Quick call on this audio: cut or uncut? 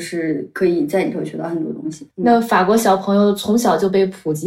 cut